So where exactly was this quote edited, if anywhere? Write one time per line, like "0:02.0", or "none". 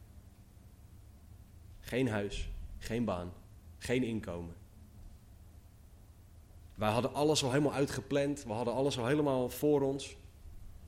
none